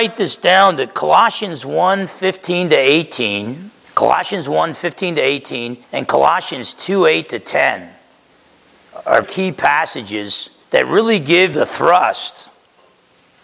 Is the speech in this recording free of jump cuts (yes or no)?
no